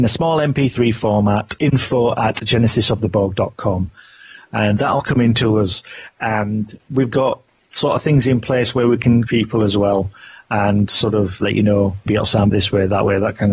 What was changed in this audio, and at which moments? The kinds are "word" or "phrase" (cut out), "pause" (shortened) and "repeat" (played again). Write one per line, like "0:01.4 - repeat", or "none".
0:01.6 - word
0:09.3 - word
0:11.4 - word
0:12.1 - word
0:12.5 - word